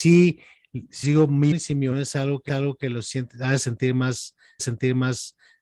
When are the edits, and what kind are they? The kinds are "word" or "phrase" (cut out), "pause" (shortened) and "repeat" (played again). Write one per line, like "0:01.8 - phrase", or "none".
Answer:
0:01.0 - word
0:01.5 - word
0:01.9 - word
0:02.5 - repeat
0:04.6 - repeat

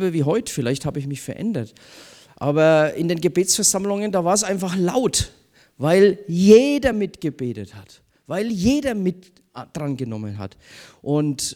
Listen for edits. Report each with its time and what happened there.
none

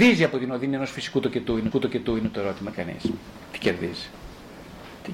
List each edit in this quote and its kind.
0:01.7 - repeat
0:02.7 - word

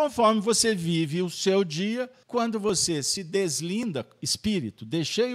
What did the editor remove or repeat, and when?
0:02.2 - pause

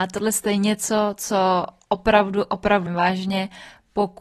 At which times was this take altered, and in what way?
0:02.9 - word

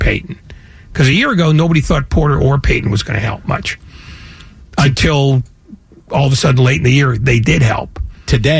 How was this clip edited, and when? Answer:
none

